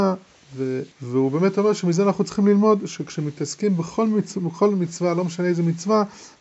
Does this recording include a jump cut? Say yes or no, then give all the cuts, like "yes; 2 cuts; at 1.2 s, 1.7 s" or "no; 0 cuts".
yes; 1 cut; at 0.9 s